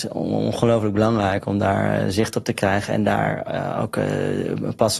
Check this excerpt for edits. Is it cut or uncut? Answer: uncut